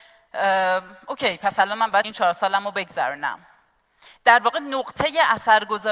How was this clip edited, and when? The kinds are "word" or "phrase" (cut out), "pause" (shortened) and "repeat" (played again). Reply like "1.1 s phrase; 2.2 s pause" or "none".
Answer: 2.0 s word